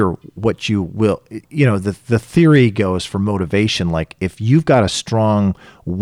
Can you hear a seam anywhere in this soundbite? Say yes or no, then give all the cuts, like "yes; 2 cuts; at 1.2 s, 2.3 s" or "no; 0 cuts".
yes; 1 cut; at 1.4 s